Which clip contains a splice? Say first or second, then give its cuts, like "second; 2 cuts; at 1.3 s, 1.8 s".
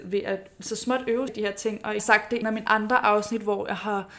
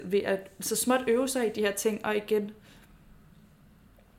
first; 3 cuts; at 1.3 s, 2.0 s, 2.4 s